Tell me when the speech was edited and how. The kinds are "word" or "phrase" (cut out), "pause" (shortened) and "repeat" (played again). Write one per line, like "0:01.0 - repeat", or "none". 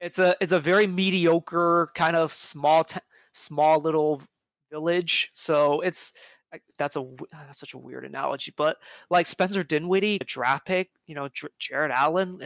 0:10.2 - phrase